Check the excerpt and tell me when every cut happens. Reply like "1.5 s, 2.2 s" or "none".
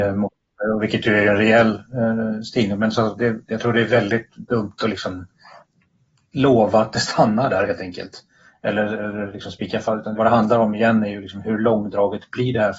10.2 s